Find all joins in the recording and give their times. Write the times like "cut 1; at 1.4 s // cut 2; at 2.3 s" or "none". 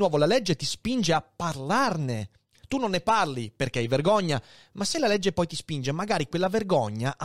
none

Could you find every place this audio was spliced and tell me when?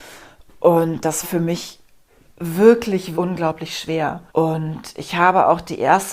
cut 1; at 1.2 s // cut 2; at 3.1 s // cut 3; at 4.3 s

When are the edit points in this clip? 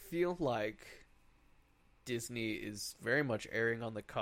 none

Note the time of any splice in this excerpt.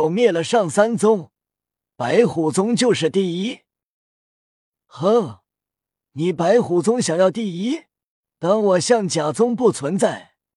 cut 1; at 8.1 s

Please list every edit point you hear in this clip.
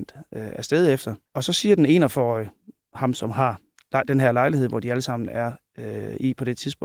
cut 1; at 1.3 s

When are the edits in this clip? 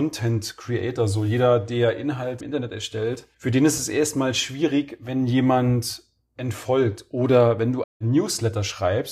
cut 1; at 2.4 s // cut 2; at 3.3 s // cut 3; at 7.8 s

